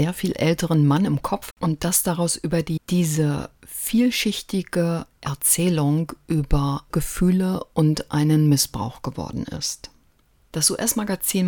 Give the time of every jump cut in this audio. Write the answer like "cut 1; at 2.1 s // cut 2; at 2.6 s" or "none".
cut 1; at 1.5 s // cut 2; at 2.8 s // cut 3; at 6.9 s